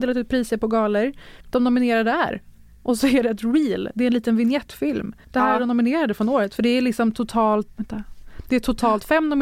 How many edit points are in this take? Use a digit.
3